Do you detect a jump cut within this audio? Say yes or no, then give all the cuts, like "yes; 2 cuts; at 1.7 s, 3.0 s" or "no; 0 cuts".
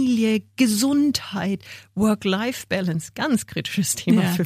no; 0 cuts